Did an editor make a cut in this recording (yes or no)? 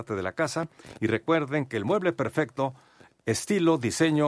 no